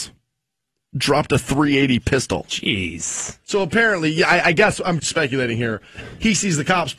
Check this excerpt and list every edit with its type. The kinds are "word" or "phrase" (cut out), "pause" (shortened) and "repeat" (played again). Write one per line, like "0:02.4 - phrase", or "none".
0:03.4 - pause
0:05.0 - word